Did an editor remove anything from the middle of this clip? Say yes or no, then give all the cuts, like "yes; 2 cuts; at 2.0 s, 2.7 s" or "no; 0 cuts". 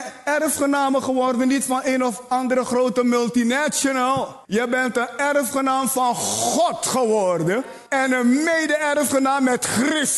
yes; 2 cuts; at 4.4 s, 7.9 s